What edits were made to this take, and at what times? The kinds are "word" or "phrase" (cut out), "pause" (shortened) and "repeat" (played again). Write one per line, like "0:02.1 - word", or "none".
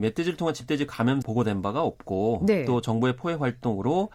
0:01.2 - phrase